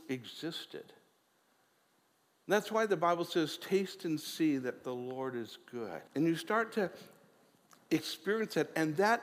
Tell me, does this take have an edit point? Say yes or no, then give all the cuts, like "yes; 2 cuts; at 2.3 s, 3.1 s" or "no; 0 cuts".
yes; 1 cut; at 6.1 s